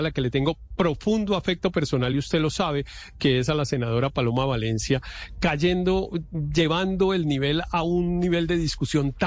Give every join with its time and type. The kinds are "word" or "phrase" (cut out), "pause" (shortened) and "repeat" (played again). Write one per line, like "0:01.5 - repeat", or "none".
none

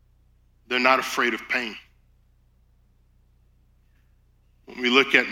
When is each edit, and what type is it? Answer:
none

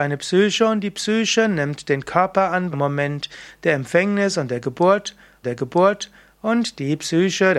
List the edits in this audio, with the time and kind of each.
0:02.7 - word
0:05.4 - repeat

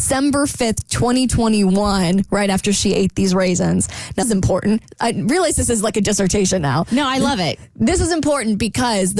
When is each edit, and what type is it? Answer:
0:04.2 - word

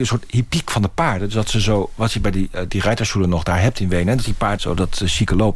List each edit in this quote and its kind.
0:02.7 - word
0:04.6 - word

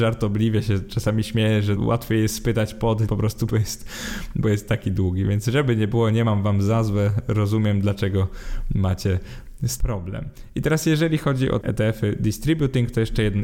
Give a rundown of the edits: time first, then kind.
0:01.8 - word
0:03.1 - word
0:03.5 - word
0:09.8 - word
0:11.6 - word

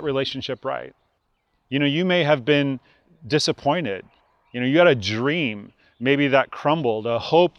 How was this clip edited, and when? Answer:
0:01.2 - pause

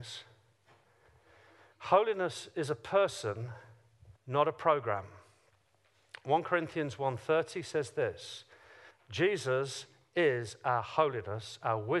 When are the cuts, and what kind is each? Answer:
0:04.2 - pause
0:08.9 - pause

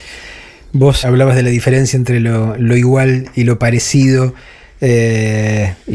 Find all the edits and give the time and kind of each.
0:01.0 - word

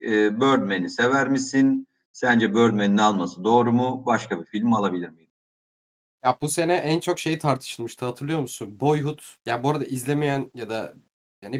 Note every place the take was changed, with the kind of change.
none

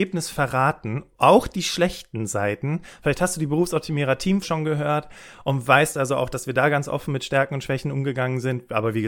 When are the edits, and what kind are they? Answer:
0:04.4 - word

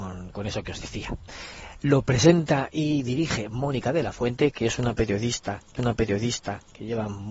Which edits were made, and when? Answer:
0:05.8 - repeat

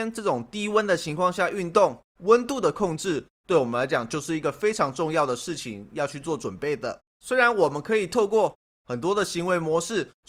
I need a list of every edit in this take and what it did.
0:07.1 - pause

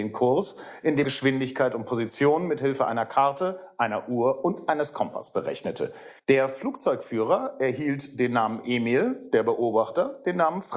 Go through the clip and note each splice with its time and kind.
0:01.0 - word
0:06.2 - pause

